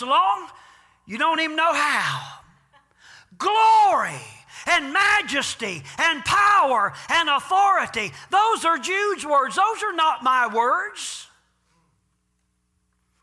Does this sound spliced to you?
no; 0 cuts

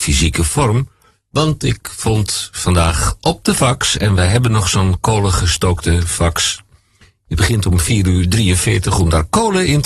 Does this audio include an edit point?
no; 0 cuts

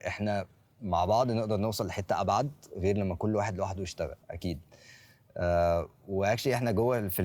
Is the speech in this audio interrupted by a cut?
yes; 1 cut; at 4.2 s

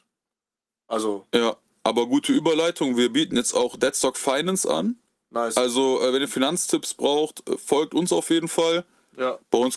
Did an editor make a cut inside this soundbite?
no; 0 cuts

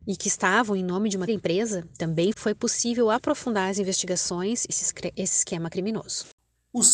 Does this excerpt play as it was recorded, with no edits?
no; 3 cuts; at 1.3 s, 2.3 s, 4.7 s

